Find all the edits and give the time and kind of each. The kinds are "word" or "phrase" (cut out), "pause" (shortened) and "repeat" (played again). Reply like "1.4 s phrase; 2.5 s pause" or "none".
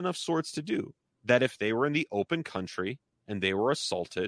1.0 s pause; 3.1 s pause